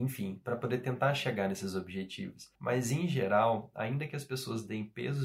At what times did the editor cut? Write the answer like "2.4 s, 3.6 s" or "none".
2.5 s